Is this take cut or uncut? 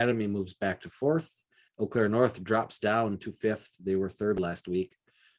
uncut